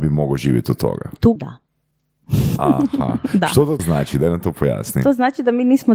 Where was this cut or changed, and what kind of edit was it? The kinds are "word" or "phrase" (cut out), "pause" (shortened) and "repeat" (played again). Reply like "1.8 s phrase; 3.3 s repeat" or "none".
1.4 s word; 3.8 s word

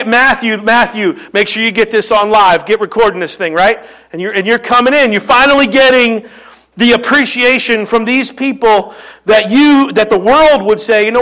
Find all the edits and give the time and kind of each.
none

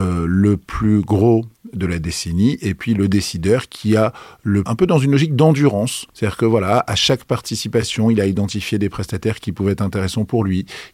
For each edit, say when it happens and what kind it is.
4.7 s phrase; 6.1 s pause

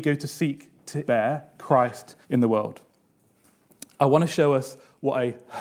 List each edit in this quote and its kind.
1.0 s word; 2.2 s pause

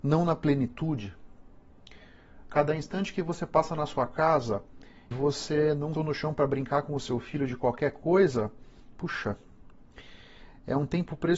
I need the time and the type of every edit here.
5.1 s word; 5.9 s word

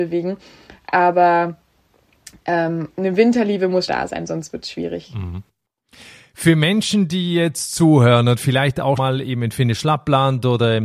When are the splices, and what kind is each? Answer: 3.9 s word; 9.0 s word

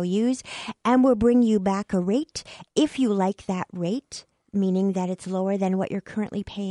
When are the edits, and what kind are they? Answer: none

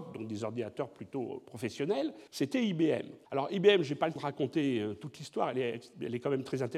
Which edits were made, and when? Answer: 2.3 s pause; 3.2 s pause; 4.2 s word

